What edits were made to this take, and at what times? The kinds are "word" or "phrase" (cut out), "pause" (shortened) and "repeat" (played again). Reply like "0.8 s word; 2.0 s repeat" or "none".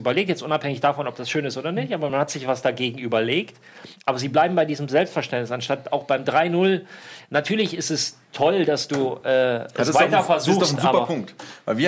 none